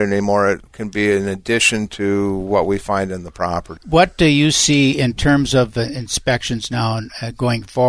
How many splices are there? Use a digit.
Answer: 1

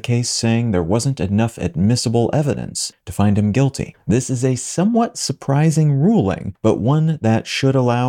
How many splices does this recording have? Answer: 0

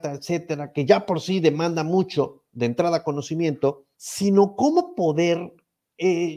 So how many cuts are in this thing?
1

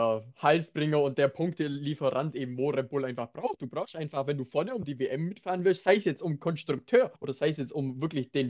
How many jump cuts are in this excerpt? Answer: 1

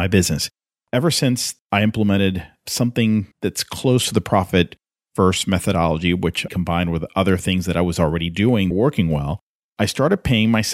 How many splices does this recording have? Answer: 4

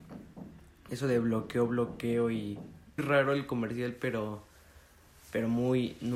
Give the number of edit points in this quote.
1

